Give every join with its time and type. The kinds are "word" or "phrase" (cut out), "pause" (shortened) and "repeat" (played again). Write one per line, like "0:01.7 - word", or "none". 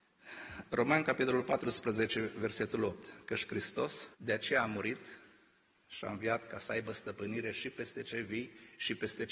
0:04.1 - pause